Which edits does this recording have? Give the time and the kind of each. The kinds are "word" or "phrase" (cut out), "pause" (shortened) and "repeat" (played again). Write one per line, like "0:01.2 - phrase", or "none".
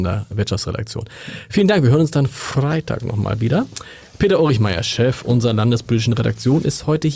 none